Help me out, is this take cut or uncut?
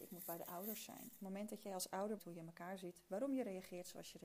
cut